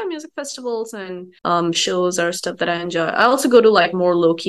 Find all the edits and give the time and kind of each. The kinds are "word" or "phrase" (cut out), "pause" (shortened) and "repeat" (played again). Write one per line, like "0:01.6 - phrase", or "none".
0:01.4 - pause